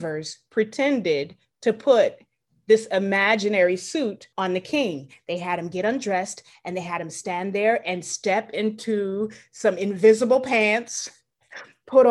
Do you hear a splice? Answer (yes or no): yes